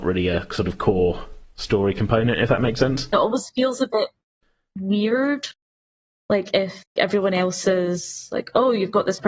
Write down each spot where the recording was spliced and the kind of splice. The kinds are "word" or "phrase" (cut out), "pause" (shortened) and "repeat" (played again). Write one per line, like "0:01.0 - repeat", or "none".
0:07.0 - word